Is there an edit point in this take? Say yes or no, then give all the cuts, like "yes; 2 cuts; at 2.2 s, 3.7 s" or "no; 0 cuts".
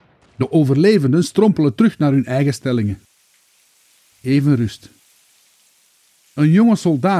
no; 0 cuts